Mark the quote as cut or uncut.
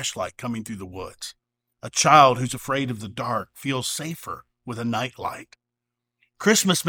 uncut